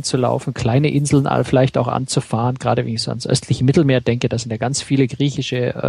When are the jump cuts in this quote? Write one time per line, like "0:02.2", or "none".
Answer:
none